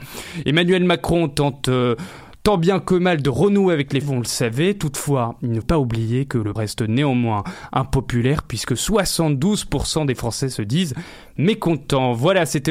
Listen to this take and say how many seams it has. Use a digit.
3